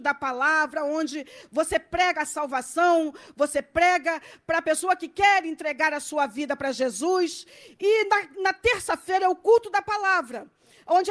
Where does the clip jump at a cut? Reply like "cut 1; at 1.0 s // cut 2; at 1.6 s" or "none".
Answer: none